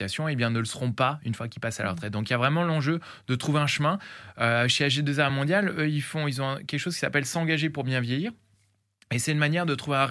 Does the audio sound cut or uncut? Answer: uncut